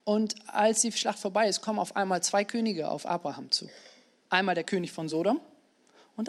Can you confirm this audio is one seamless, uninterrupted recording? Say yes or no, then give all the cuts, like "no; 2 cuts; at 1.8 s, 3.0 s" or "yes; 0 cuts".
yes; 0 cuts